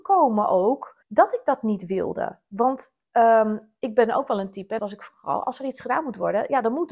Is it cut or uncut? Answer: cut